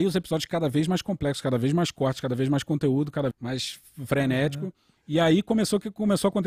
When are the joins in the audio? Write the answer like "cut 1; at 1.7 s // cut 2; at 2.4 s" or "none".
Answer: cut 1; at 3.3 s // cut 2; at 5.0 s